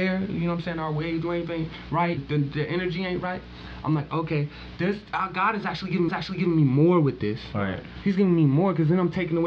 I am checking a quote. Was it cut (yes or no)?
yes